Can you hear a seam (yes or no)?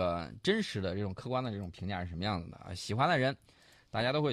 no